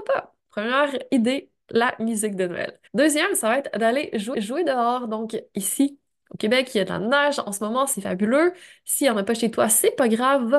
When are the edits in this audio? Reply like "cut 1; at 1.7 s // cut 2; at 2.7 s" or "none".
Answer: cut 1; at 2.9 s // cut 2; at 4.3 s